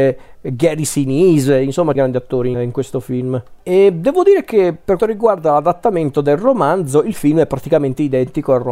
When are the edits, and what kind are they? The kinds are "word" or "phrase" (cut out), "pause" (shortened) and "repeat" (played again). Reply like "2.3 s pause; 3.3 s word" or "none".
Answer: 1.9 s phrase; 2.5 s word; 3.6 s pause; 5.0 s word

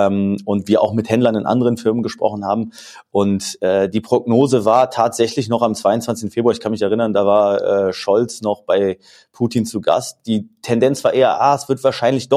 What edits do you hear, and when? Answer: none

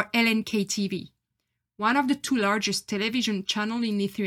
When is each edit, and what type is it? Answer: none

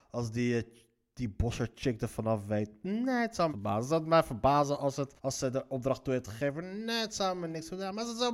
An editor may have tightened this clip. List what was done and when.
3.5 s phrase; 5.2 s pause

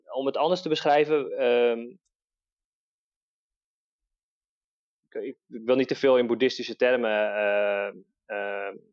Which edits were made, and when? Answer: none

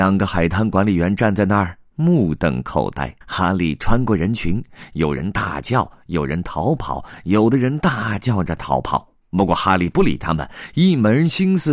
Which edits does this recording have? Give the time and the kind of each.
3.2 s pause

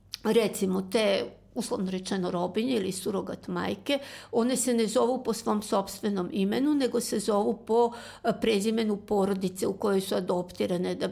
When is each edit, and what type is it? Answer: none

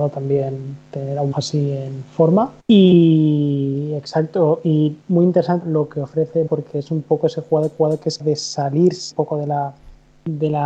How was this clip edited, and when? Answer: 1.3 s word; 2.6 s pause; 5.0 s pause; 5.6 s phrase; 6.5 s word; 7.7 s repeat; 8.2 s word; 9.1 s word

